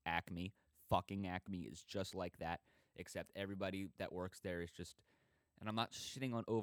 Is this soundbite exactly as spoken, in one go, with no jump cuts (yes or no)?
yes